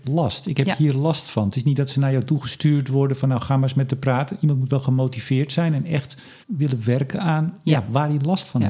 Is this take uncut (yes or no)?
no